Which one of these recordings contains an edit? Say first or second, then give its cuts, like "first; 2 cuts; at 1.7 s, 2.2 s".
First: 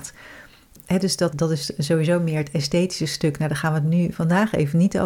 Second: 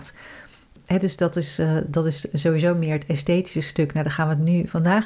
first; 1 cut; at 1.3 s